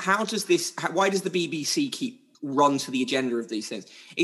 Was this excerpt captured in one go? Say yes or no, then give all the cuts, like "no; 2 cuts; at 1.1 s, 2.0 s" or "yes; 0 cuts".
no; 1 cut; at 2.3 s